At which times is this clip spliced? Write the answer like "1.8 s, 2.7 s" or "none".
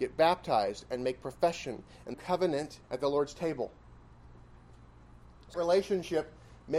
2.1 s, 2.8 s, 5.5 s